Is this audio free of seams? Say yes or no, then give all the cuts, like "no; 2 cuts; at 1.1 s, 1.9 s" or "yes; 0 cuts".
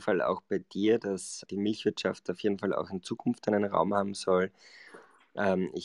no; 1 cut; at 1.5 s